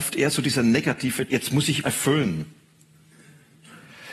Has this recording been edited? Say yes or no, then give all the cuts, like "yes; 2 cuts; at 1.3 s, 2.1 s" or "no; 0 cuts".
yes; 2 cuts; at 1.3 s, 1.8 s